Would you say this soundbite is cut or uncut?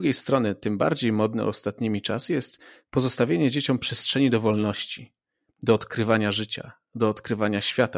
uncut